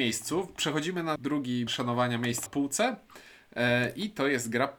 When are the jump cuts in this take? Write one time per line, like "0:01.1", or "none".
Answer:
0:01.2
0:01.7
0:02.5